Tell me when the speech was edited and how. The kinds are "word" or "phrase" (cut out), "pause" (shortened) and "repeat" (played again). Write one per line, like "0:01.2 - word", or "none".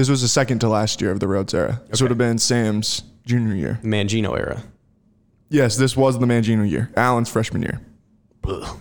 none